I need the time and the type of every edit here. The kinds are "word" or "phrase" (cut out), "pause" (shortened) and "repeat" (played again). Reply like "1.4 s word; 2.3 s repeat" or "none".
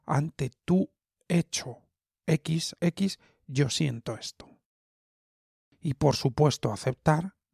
2.8 s word